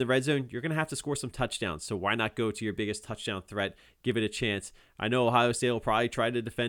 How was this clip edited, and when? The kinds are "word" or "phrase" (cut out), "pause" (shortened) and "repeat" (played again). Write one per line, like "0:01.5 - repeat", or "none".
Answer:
none